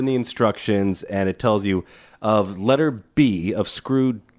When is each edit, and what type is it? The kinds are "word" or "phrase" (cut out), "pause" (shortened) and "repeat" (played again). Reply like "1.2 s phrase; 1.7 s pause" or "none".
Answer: none